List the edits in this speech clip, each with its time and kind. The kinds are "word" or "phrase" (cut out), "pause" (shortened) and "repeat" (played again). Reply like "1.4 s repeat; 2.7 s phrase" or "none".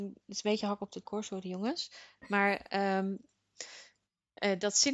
1.0 s word